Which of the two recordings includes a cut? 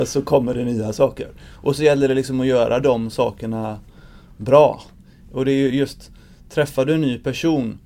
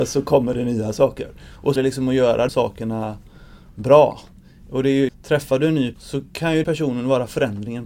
second; 5 cuts; at 1.8 s, 2.5 s, 5.1 s, 5.9 s, 6.6 s

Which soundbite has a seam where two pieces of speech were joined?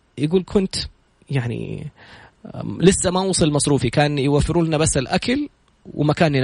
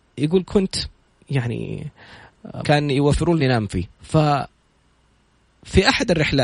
second; 3 cuts; at 2.6 s, 3.4 s, 3.9 s

